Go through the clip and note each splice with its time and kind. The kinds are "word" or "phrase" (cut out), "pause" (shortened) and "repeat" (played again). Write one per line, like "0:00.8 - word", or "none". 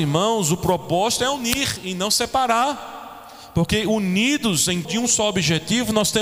0:04.8 - word